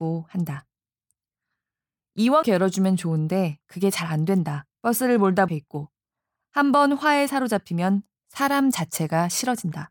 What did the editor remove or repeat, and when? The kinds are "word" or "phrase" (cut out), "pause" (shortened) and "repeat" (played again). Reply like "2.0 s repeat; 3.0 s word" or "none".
2.4 s phrase; 4.7 s pause; 5.5 s phrase